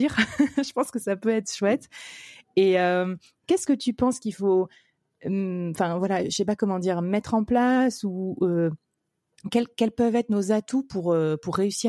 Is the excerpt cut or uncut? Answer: uncut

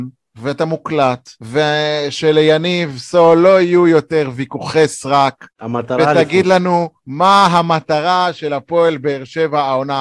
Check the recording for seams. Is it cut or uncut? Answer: cut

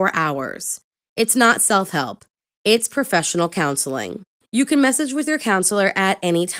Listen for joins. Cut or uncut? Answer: uncut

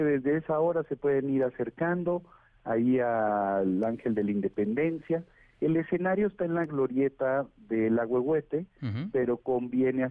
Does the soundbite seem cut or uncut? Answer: uncut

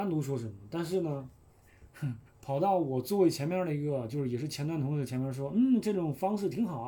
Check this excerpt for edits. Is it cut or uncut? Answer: cut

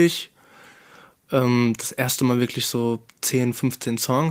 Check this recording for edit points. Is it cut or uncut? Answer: uncut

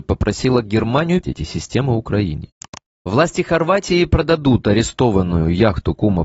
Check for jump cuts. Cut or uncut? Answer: cut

